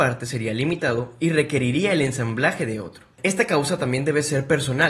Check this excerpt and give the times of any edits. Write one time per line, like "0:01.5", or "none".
none

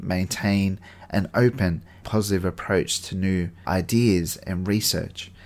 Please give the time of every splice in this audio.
0:02.0
0:03.6

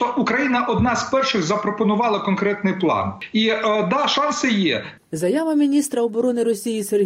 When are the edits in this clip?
none

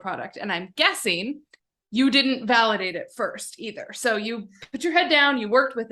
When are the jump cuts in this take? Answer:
none

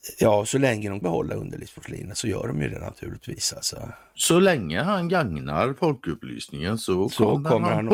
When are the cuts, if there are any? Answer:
0:01.0

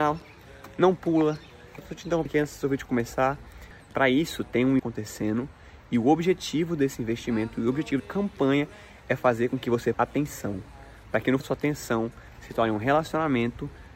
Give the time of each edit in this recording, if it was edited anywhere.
0:01.8
0:02.3
0:04.8
0:08.0
0:09.9
0:11.4

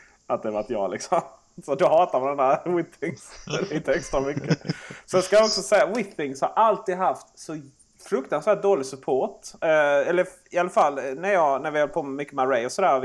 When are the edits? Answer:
none

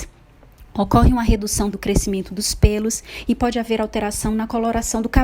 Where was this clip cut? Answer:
0:01.7

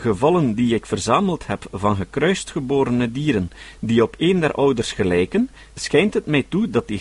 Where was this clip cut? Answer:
none

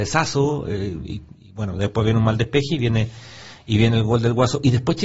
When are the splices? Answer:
none

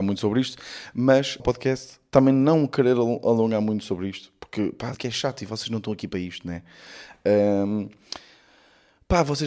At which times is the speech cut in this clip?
0:01.4
0:04.9

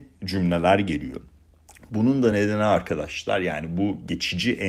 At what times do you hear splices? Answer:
none

